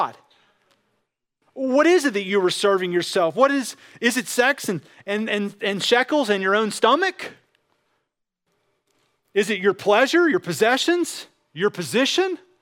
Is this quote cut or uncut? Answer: uncut